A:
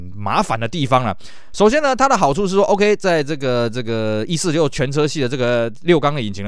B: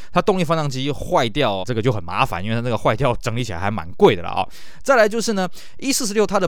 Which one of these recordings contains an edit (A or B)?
B